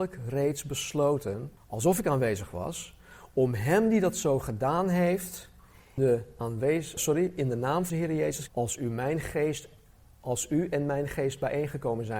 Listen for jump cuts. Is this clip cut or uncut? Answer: cut